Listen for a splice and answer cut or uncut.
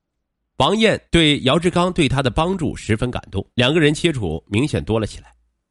cut